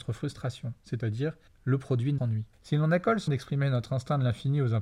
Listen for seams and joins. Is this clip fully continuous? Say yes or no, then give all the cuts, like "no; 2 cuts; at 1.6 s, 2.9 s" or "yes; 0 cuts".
no; 4 cuts; at 1.5 s, 2.2 s, 2.5 s, 3.3 s